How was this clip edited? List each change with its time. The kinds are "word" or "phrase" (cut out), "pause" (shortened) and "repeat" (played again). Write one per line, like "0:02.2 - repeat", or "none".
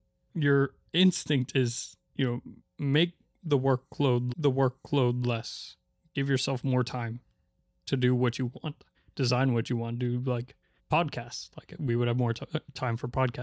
0:02.0 - pause
0:04.3 - repeat
0:07.8 - word
0:08.9 - pause
0:10.8 - pause